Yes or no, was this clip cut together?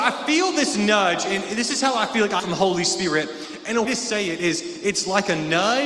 yes